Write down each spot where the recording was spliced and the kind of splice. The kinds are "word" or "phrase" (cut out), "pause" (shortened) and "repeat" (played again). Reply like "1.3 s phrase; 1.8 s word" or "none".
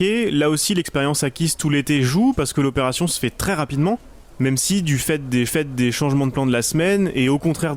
5.5 s repeat